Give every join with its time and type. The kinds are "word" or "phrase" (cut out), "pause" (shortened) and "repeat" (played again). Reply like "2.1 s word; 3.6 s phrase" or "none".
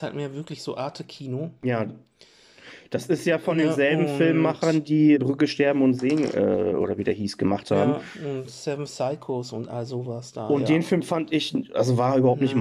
5.2 s word